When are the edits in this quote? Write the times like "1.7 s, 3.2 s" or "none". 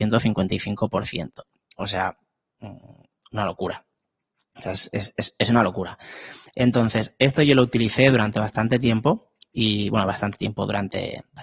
none

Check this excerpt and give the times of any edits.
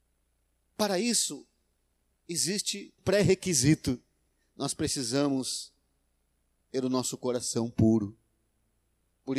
3.0 s

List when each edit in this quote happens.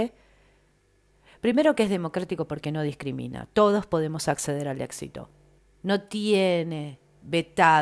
5.6 s

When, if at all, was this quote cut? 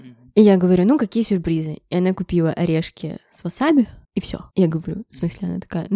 4.0 s, 4.5 s

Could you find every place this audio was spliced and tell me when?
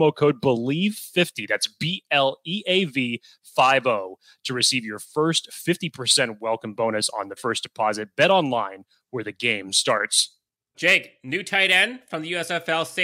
7.4 s, 10.7 s

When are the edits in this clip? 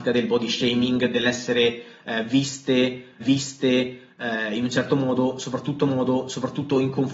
3.2 s, 5.8 s

